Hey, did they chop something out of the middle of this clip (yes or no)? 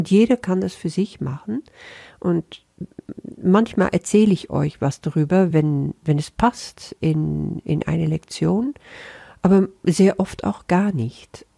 no